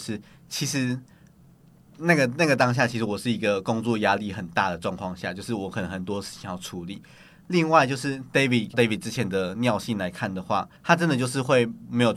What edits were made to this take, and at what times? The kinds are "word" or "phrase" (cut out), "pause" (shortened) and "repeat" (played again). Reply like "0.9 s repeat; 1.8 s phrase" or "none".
8.7 s phrase; 10.8 s pause